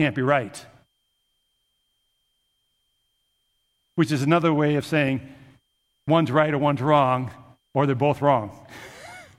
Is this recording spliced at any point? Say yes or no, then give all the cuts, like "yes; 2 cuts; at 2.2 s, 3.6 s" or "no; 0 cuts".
no; 0 cuts